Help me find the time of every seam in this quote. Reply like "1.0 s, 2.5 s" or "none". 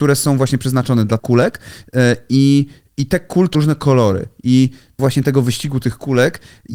1.2 s, 3.5 s, 5.0 s